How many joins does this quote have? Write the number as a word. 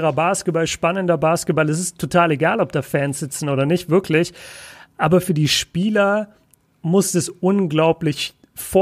zero